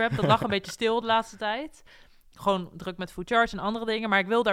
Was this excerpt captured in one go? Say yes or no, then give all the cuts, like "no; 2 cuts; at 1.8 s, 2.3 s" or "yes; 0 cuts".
yes; 0 cuts